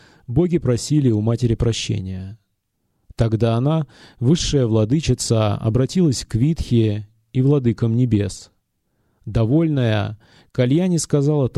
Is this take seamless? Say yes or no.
yes